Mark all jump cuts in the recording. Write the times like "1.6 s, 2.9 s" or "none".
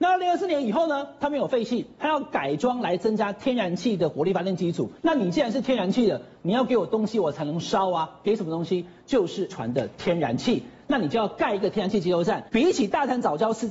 5.0 s, 9.5 s, 12.5 s